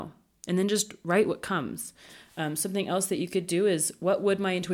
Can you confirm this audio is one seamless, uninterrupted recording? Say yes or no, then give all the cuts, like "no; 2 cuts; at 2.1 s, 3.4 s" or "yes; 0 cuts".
yes; 0 cuts